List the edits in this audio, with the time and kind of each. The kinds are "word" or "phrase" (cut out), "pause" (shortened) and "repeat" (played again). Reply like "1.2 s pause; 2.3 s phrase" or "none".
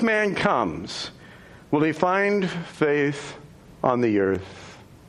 none